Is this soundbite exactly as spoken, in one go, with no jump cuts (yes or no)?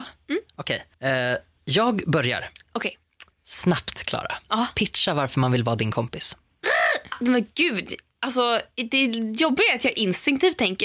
no